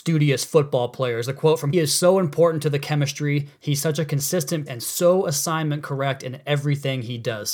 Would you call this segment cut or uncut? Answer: cut